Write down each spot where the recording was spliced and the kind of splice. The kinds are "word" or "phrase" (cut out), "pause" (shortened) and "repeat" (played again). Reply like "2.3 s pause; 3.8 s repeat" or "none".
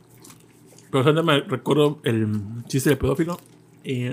none

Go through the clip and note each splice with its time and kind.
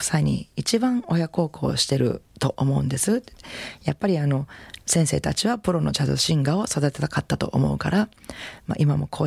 4.8 s pause

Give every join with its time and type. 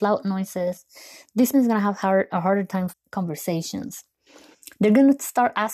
1.5 s word; 2.9 s word

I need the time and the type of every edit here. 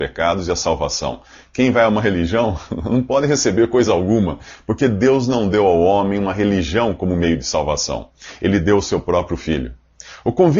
none

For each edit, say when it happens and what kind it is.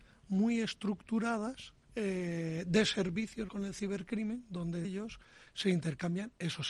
1.8 s pause; 3.5 s word; 4.8 s word

